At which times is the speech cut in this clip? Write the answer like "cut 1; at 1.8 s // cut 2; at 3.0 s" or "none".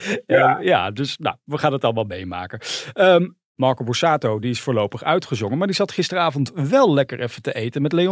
none

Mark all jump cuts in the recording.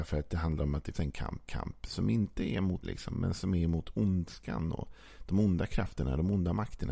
cut 1; at 0.9 s // cut 2; at 1.5 s // cut 3; at 2.8 s

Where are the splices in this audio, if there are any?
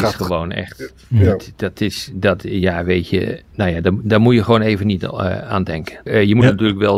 cut 1; at 3.5 s

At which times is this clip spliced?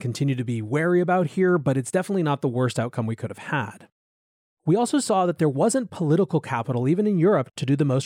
none

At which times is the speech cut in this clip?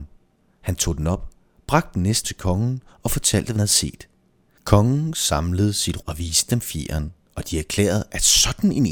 cut 1; at 2.2 s // cut 2; at 3.6 s // cut 3; at 6.0 s

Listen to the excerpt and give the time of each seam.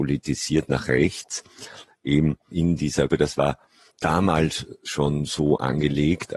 cut 1; at 2.5 s // cut 2; at 3.1 s // cut 3; at 3.9 s

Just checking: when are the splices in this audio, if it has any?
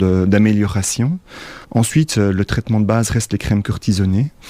cut 1; at 1.6 s

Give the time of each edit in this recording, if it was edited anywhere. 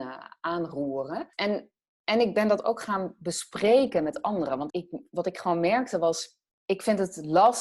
cut 1; at 4.7 s

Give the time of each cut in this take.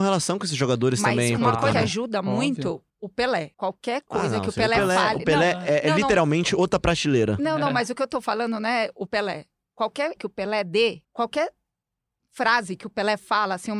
cut 1; at 1.7 s // cut 2; at 2.9 s // cut 3; at 3.5 s // cut 4; at 9.1 s // cut 5; at 10.2 s // cut 6; at 11.0 s

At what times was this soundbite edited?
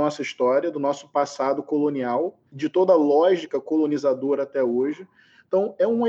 cut 1; at 2.5 s

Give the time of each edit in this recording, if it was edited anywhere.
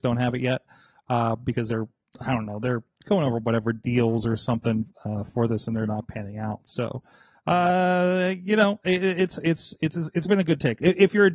none

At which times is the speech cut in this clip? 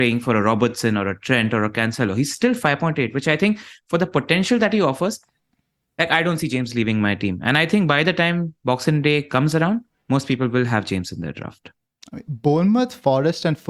none

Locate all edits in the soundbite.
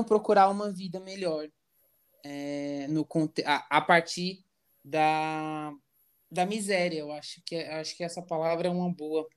none

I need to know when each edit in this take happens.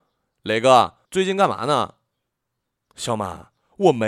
cut 1; at 1.1 s

